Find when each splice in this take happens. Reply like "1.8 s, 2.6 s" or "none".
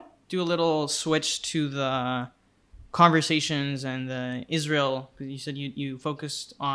none